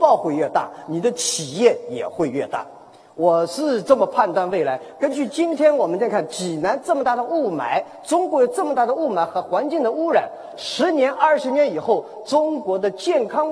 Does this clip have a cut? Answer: yes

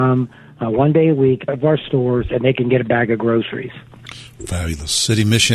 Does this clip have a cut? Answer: yes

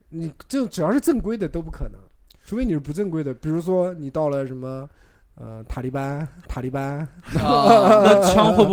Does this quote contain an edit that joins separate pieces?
yes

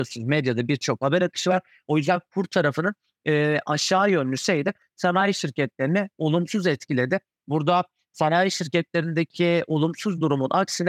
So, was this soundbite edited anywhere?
no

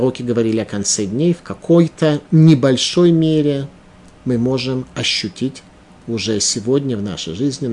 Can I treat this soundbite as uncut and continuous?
yes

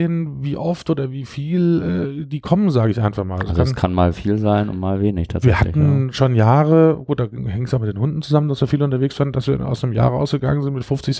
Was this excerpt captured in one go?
yes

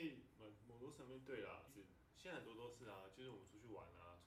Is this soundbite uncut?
no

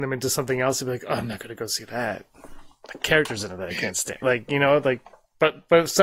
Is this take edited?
no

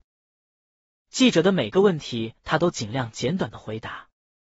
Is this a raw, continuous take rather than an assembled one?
no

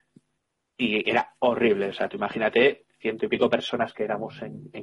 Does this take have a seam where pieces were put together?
no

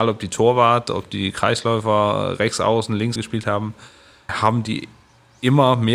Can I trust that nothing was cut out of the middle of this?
no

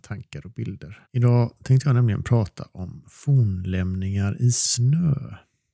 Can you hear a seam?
yes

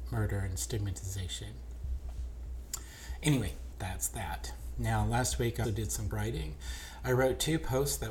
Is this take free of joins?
no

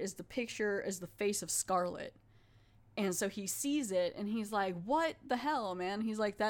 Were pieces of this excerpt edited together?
no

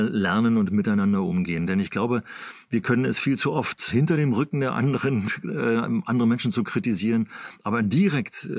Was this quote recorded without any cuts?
yes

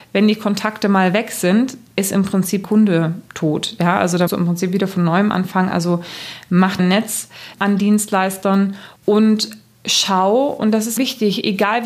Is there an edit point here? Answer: yes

